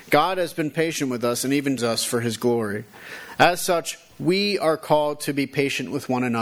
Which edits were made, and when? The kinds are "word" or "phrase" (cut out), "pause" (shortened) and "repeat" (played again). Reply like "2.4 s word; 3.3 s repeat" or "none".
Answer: 1.8 s word